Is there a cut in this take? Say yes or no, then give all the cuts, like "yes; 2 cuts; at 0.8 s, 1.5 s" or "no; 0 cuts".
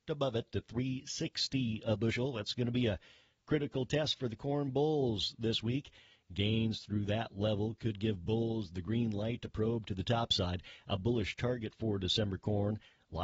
no; 0 cuts